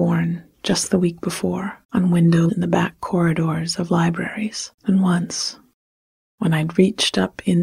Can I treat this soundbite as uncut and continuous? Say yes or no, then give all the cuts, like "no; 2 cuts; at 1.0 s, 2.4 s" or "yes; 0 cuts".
no; 3 cuts; at 1.8 s, 2.5 s, 4.8 s